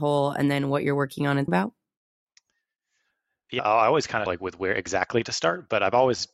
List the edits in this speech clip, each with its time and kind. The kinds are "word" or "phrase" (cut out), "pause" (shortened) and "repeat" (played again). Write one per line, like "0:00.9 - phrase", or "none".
0:01.5 - word
0:03.6 - word
0:04.3 - word